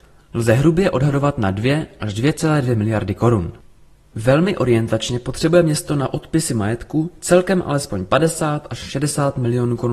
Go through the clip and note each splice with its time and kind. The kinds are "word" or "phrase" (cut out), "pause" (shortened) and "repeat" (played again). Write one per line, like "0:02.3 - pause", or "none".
none